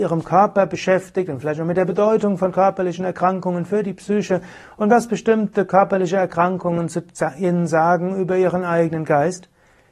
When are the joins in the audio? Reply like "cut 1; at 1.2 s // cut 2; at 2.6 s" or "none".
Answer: none

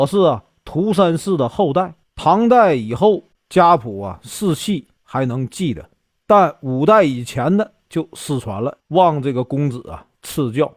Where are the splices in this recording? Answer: cut 1; at 2.0 s // cut 2; at 5.0 s // cut 3; at 6.2 s // cut 4; at 8.8 s

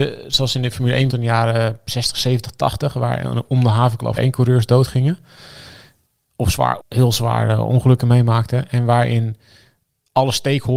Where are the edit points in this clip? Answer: cut 1; at 1.1 s // cut 2; at 4.2 s // cut 3; at 6.8 s

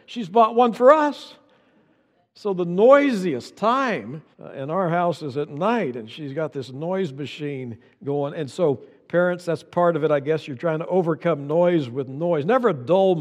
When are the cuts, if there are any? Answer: cut 1; at 4.3 s

